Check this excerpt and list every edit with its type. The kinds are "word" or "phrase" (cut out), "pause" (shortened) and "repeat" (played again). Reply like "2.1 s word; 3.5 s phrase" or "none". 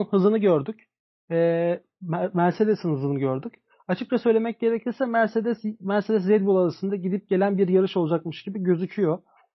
none